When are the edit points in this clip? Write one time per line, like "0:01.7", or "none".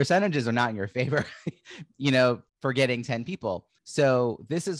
0:02.5
0:03.8